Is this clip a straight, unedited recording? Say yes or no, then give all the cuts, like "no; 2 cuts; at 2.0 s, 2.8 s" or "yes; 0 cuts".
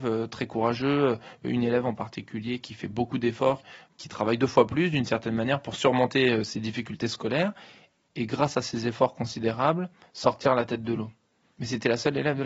yes; 0 cuts